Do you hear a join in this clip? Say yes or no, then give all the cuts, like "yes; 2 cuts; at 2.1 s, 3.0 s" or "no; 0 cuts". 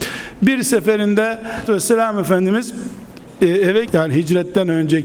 yes; 2 cuts; at 1.7 s, 3.9 s